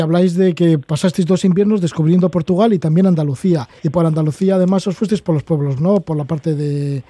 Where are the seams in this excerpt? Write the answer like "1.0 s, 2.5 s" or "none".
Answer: 3.8 s, 5.8 s